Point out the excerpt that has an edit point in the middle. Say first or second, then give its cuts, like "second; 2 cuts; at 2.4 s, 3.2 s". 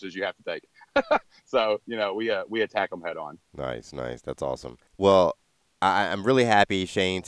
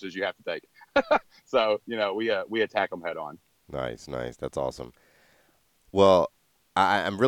first; 2 cuts; at 3.4 s, 4.9 s